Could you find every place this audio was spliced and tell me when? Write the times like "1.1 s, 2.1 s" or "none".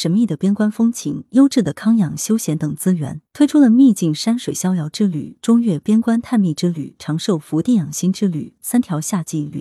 3.3 s